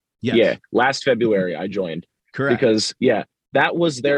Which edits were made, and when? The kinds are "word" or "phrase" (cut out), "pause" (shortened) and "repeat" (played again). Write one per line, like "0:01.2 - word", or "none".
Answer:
none